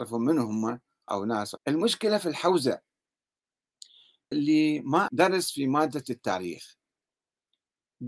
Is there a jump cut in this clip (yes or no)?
yes